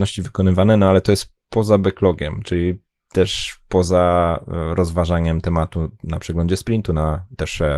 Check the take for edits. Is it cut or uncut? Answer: uncut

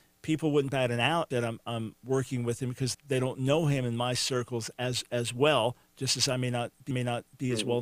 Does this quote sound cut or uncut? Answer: cut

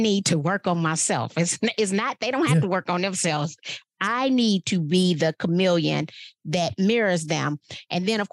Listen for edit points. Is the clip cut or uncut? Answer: uncut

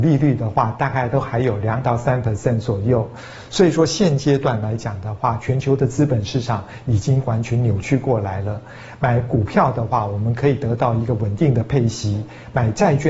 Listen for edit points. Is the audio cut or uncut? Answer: cut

